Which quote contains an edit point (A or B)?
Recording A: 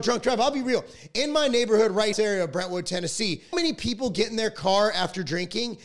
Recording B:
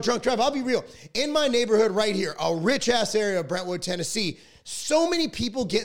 A